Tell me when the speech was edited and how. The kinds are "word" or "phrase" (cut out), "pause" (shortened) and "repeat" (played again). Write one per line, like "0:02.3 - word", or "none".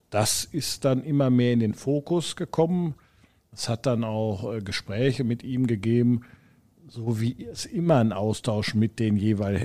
none